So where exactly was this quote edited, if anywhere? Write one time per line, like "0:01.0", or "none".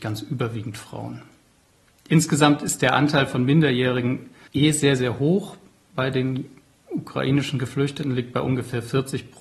none